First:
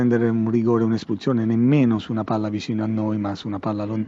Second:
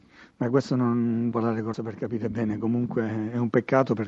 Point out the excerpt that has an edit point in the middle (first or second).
second